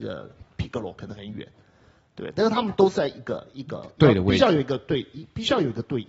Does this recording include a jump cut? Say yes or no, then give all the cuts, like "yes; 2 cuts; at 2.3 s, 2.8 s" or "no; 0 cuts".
no; 0 cuts